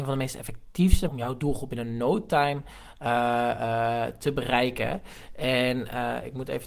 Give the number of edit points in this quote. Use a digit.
1